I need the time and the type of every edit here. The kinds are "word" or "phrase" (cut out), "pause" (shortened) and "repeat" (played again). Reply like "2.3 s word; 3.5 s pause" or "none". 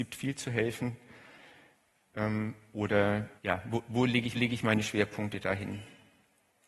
3.4 s pause; 4.3 s repeat